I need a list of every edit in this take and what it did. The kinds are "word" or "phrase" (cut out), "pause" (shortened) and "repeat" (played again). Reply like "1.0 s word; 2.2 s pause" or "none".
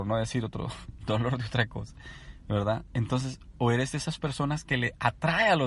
none